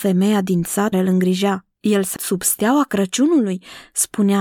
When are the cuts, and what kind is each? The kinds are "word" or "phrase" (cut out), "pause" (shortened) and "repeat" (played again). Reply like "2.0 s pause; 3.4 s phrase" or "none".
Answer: 0.9 s word; 1.7 s pause; 2.2 s word